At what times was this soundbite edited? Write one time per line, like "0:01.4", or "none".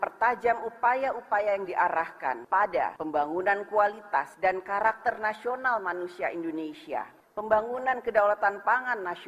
none